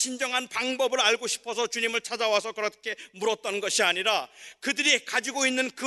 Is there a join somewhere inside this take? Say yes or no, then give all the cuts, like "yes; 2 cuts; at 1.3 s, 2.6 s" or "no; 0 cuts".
no; 0 cuts